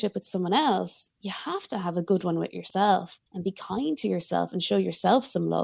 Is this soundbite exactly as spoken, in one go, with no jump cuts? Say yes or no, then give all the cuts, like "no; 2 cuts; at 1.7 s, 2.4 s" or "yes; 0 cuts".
no; 1 cut; at 3.3 s